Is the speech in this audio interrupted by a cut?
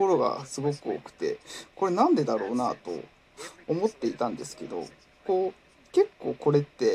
no; 0 cuts

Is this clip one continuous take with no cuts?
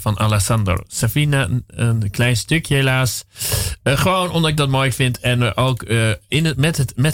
yes; 0 cuts

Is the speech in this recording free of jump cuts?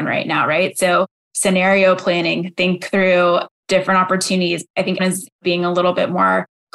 no; 1 cut; at 5.0 s

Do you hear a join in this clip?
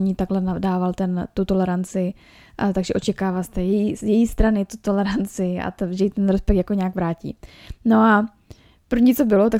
no; 0 cuts

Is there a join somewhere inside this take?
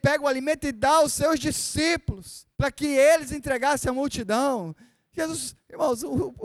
yes; 1 cut; at 2.5 s

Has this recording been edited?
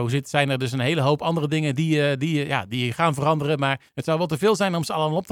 yes; 1 cut; at 3.9 s

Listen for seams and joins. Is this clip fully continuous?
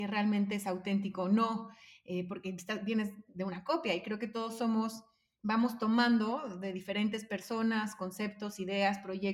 yes; 0 cuts

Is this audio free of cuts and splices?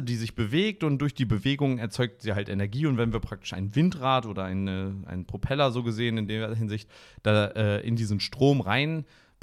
yes; 0 cuts

